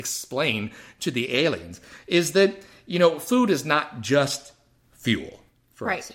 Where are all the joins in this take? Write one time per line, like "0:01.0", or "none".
none

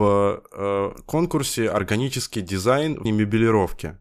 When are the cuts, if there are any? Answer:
0:03.1

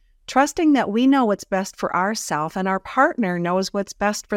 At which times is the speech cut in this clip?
none

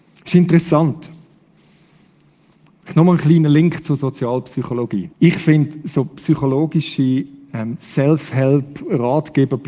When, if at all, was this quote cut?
0:05.1

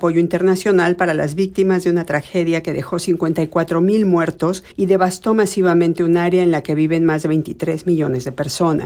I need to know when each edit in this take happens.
0:04.7

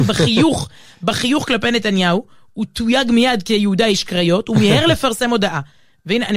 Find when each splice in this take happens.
none

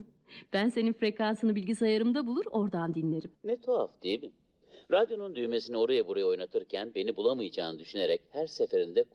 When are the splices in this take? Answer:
0:03.3

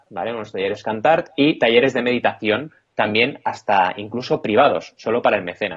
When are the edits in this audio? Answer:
none

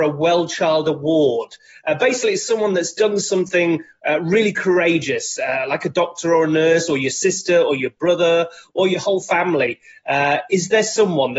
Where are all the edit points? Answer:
none

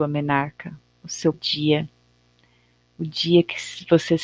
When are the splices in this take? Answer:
0:01.3

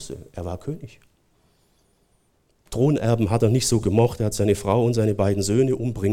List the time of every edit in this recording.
none

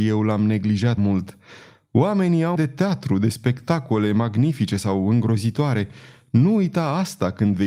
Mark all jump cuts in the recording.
0:01.0
0:02.6

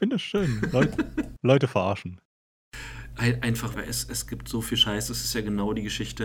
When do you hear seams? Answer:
0:03.7

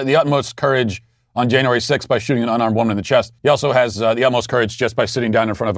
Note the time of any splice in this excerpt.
0:03.4

